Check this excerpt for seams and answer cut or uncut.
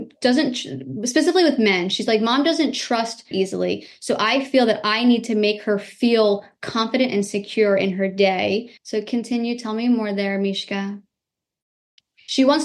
cut